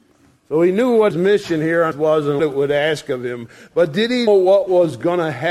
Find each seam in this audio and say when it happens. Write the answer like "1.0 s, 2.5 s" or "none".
1.1 s, 1.9 s, 2.4 s, 4.3 s